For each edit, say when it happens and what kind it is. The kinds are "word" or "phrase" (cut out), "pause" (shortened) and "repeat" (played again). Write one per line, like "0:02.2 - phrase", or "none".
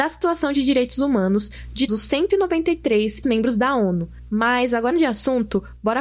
0:01.9 - word
0:03.2 - word
0:04.9 - word